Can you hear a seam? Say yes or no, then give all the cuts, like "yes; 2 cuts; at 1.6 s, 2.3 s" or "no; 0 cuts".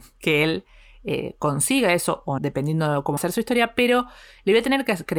yes; 2 cuts; at 2.4 s, 3.2 s